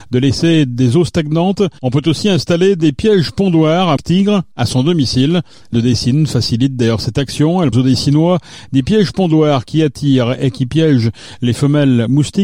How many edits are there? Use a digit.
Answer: 3